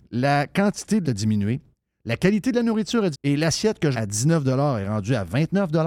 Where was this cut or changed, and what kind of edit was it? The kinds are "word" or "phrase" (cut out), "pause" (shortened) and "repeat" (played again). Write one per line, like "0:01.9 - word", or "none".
0:01.0 - word
0:03.1 - word
0:03.9 - word